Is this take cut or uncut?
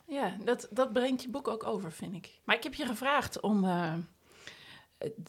uncut